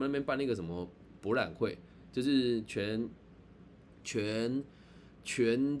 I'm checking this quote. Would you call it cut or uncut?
uncut